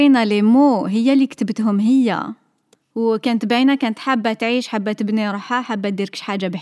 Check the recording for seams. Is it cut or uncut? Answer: uncut